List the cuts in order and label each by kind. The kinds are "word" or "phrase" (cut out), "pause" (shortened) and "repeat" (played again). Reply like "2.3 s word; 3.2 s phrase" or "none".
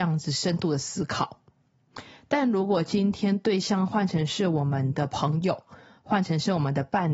none